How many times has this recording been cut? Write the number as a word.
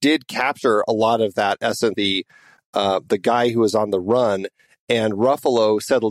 one